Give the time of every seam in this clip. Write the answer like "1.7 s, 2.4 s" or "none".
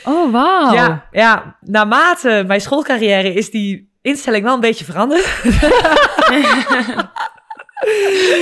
1.6 s